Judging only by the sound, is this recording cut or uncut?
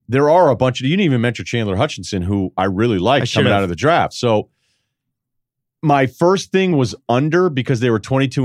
uncut